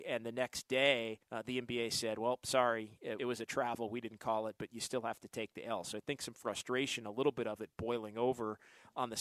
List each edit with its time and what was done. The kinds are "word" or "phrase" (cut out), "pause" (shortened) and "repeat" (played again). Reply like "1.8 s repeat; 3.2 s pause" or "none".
1.2 s pause; 3.2 s phrase; 4.6 s word